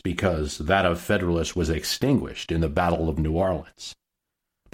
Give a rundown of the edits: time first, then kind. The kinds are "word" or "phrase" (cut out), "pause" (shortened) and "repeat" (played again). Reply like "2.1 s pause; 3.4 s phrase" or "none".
none

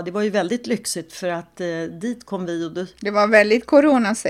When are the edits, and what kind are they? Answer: none

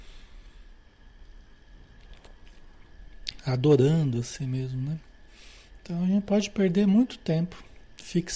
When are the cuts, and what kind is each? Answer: none

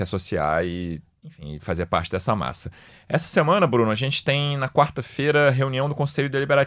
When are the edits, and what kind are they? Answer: none

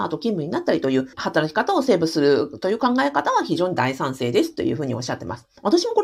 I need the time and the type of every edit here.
1.1 s pause

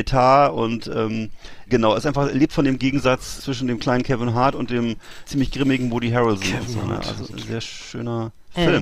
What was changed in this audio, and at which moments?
1.7 s word; 3.4 s word; 5.2 s word; 7.3 s word

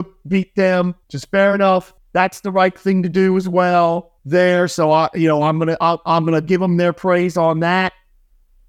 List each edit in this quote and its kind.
1.0 s pause; 2.0 s pause; 4.2 s pause

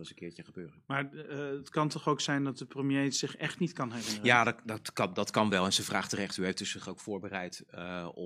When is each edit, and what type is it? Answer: none

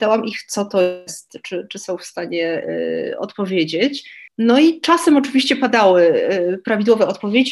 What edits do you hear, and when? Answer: 4.3 s pause

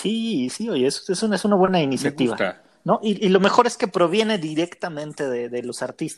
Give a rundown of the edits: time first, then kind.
none

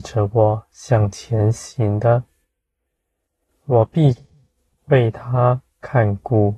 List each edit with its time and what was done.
none

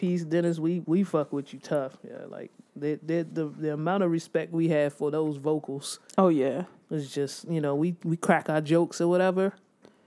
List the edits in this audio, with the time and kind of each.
none

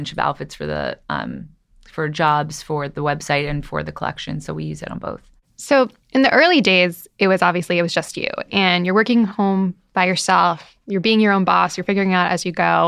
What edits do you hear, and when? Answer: none

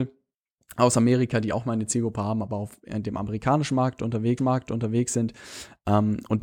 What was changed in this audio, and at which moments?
4.4 s repeat

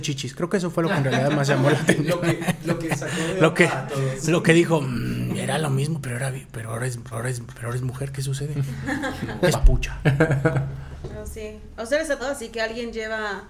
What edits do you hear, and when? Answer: 7.1 s repeat; 9.5 s word; 12.2 s word

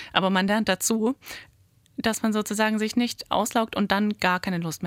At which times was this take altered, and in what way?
none

